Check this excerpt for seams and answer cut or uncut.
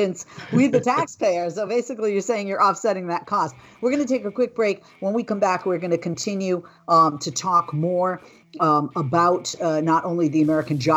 uncut